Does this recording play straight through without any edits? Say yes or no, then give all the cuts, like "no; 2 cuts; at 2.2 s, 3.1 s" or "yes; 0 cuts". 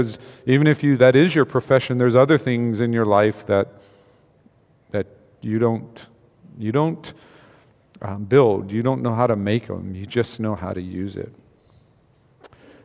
yes; 0 cuts